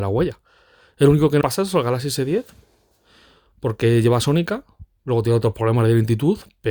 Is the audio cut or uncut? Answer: cut